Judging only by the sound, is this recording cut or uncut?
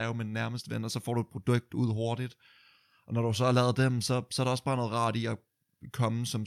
uncut